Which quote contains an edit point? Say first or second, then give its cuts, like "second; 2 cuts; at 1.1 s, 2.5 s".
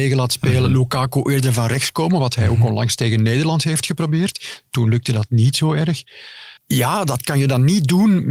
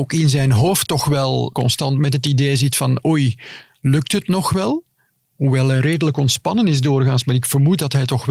first; 1 cut; at 6.6 s